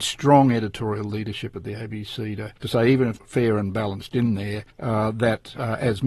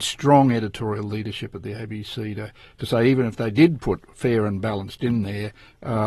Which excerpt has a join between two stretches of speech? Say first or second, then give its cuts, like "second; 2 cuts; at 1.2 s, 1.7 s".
first; 3 cuts; at 2.6 s, 3.2 s, 4.7 s